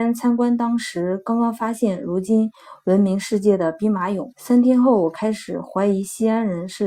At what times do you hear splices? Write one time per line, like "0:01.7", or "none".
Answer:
0:04.3